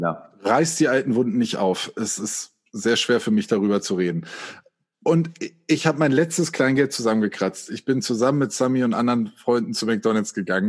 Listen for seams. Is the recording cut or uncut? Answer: uncut